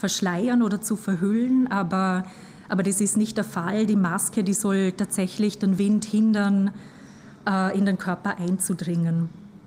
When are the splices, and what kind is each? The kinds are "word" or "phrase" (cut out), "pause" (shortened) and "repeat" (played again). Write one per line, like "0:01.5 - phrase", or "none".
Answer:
none